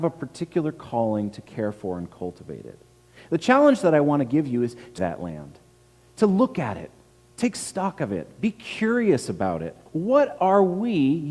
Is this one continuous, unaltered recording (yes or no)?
no